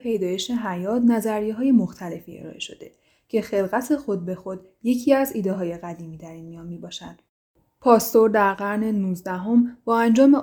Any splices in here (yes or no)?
no